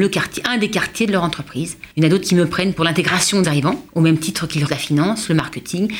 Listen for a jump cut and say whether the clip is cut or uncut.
cut